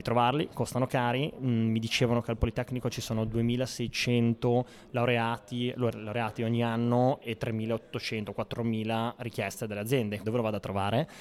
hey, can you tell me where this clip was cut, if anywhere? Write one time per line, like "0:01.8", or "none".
0:10.2

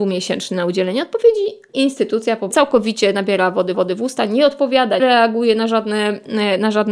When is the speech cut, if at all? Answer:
0:01.7
0:02.5
0:03.7
0:05.0

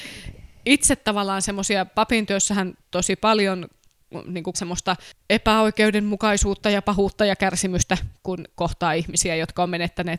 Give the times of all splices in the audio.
0:02.8
0:04.5

